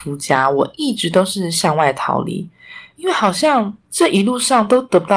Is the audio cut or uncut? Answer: cut